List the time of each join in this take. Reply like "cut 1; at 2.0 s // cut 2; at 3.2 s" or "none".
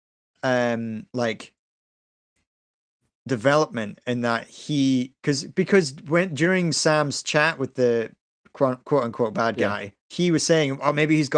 cut 1; at 1.1 s // cut 2; at 10.0 s